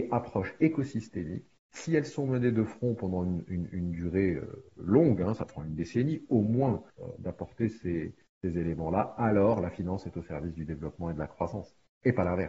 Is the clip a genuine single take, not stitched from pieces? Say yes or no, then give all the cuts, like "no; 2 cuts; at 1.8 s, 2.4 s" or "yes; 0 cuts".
no; 1 cut; at 6.9 s